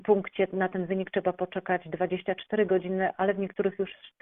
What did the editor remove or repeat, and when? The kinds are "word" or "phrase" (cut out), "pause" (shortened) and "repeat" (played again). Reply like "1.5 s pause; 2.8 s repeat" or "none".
none